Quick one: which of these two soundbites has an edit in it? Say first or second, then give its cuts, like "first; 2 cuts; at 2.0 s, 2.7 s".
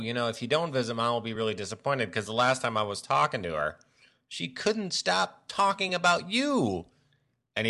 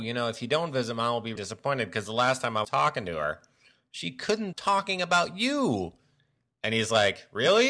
second; 3 cuts; at 1.4 s, 2.6 s, 4.5 s